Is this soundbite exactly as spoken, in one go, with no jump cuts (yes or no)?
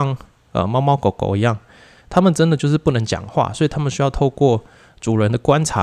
yes